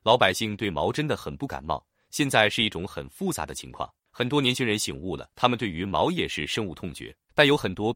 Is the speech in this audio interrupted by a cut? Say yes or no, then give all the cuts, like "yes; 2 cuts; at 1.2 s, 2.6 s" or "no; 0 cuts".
yes; 1 cut; at 5.3 s